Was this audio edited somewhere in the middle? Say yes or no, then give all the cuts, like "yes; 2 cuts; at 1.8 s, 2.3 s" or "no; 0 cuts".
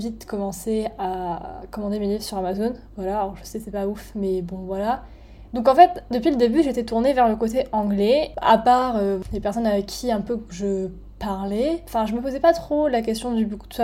no; 0 cuts